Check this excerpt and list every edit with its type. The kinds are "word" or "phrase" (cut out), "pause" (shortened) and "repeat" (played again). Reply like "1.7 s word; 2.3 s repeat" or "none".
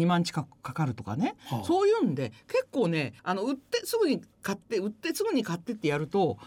3.2 s pause